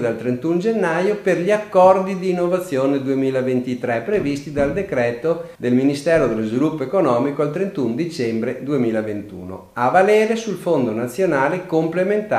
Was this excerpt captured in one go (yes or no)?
no